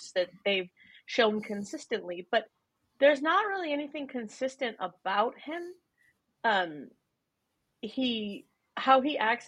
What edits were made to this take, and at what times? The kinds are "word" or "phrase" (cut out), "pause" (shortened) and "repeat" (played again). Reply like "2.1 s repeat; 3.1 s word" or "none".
none